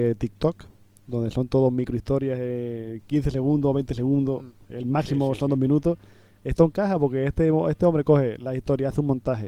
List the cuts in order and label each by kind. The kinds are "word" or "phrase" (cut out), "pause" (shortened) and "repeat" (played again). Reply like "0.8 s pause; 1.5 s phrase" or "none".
none